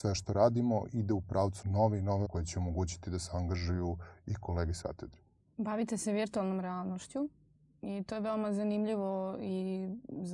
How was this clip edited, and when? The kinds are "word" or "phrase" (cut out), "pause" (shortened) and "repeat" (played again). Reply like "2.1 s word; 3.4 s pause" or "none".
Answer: 1.6 s word; 2.2 s word; 4.8 s word